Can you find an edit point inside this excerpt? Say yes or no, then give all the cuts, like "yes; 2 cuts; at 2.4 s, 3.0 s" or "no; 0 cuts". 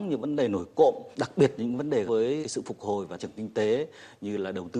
yes; 4 cuts; at 1.1 s, 2.1 s, 2.4 s, 3.2 s